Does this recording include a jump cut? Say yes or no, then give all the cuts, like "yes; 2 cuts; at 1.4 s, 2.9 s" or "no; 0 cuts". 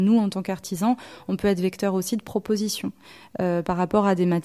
no; 0 cuts